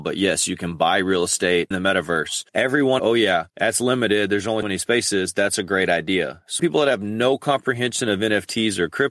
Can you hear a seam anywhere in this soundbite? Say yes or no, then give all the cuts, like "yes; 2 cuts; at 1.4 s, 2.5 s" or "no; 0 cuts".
yes; 6 cuts; at 1.7 s, 2.5 s, 3.0 s, 3.5 s, 4.6 s, 6.6 s